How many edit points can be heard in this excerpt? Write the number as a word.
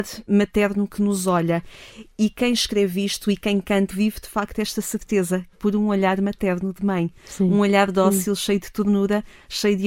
two